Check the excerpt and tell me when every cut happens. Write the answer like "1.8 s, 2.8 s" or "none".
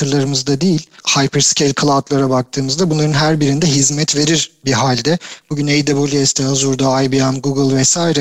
1.0 s

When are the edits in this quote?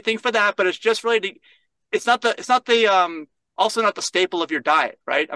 none

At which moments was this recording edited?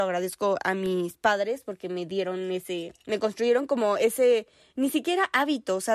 3.0 s

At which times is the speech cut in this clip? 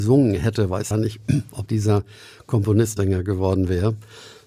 0.9 s, 1.7 s, 3.0 s

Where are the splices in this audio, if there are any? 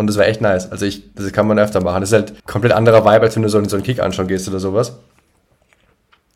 1.1 s, 2.4 s

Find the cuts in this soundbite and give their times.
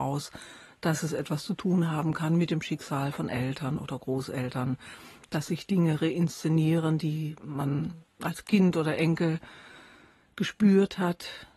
none

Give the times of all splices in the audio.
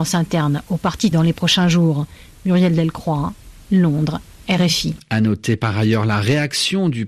1.1 s

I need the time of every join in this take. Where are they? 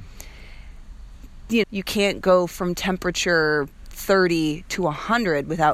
1.6 s

